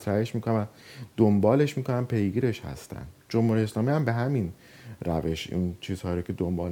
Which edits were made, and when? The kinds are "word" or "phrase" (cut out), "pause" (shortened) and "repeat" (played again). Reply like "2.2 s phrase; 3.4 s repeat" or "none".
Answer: 3.2 s pause